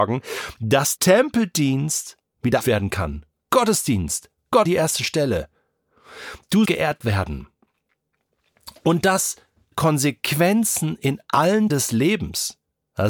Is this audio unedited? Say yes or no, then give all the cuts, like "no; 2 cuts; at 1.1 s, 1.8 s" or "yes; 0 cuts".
no; 6 cuts; at 1.0 s, 2.6 s, 4.6 s, 6.6 s, 9.7 s, 11.7 s